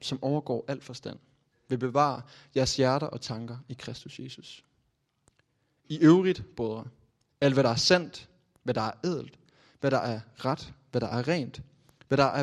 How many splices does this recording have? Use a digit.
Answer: 0